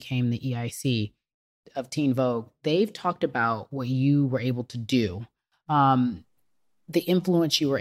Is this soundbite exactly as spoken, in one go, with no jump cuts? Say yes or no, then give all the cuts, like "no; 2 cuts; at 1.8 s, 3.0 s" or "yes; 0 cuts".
yes; 0 cuts